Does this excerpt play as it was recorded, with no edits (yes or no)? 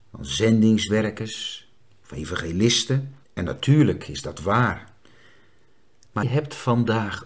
no